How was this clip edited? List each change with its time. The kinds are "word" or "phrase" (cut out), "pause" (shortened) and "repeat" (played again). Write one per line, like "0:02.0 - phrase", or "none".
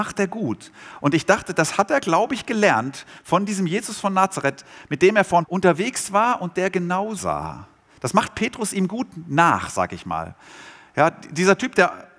0:05.4 - phrase
0:07.2 - phrase